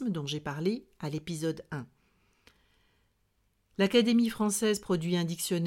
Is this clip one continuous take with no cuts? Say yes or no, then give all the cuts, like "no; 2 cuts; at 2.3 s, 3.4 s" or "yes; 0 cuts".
yes; 0 cuts